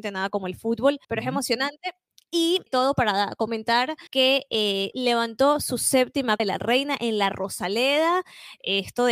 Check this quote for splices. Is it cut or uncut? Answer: cut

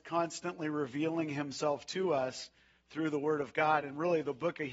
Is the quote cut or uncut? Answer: uncut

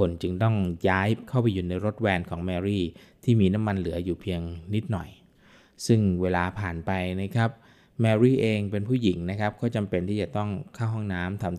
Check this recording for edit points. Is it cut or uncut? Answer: uncut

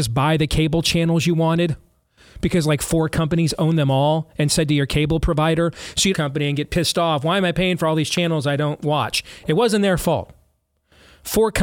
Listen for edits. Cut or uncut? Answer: cut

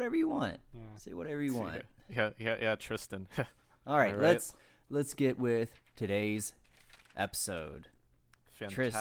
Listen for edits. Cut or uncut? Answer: uncut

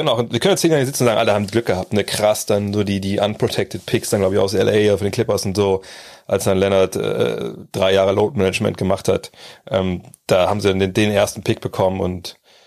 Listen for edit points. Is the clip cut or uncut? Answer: uncut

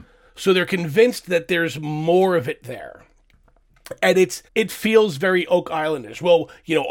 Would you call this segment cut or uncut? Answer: cut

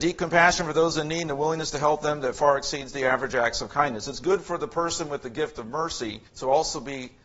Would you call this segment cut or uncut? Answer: cut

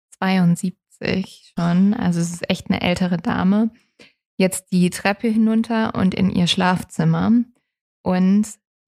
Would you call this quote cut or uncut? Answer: uncut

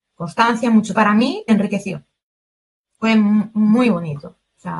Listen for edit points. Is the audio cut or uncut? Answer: cut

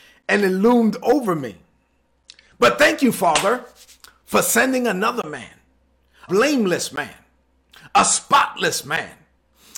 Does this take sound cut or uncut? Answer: cut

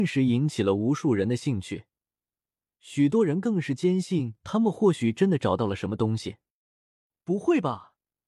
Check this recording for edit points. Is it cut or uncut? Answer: uncut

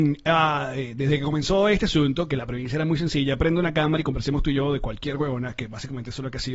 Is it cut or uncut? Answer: uncut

